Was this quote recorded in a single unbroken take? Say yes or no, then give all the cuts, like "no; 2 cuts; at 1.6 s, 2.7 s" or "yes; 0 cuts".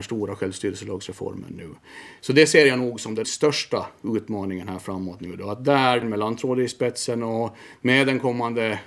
no; 2 cuts; at 3.2 s, 6.0 s